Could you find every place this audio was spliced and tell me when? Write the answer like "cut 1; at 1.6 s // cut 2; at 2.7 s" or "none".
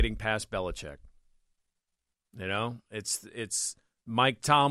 none